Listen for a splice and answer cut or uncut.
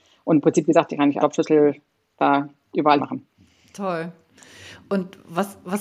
cut